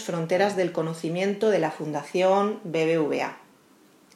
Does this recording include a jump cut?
no; 0 cuts

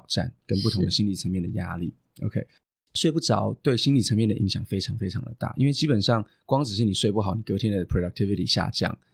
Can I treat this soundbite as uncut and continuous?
yes; 0 cuts

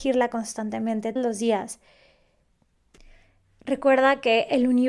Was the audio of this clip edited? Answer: yes; 1 cut; at 1.2 s

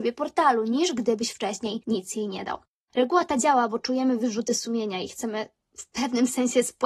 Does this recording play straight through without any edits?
yes; 0 cuts

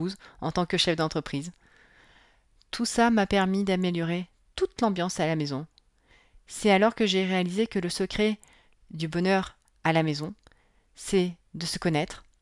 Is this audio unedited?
yes; 0 cuts

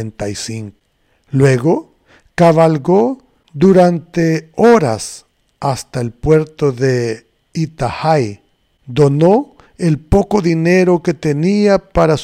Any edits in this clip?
no; 0 cuts

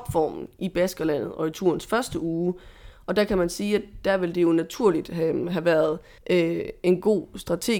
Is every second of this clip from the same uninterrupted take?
no; 1 cut; at 6.2 s

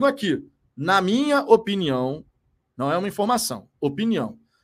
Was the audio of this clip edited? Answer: no; 0 cuts

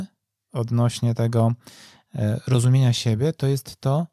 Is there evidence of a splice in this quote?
no; 0 cuts

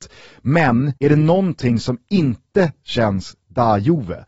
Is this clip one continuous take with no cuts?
no; 1 cut; at 1.0 s

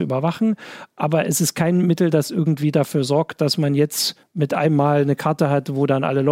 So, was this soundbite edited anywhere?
yes; 1 cut; at 4.2 s

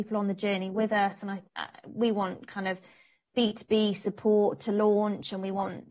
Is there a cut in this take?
yes; 1 cut; at 1.5 s

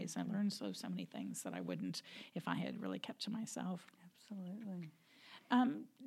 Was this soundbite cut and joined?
no; 0 cuts

